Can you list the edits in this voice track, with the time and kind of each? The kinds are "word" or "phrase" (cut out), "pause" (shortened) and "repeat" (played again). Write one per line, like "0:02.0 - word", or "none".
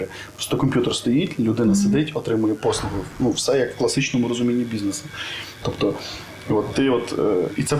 none